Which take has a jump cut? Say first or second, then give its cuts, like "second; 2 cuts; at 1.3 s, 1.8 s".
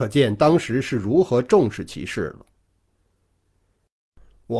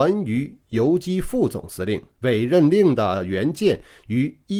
second; 1 cut; at 2.1 s